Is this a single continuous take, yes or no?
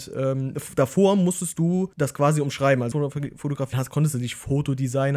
no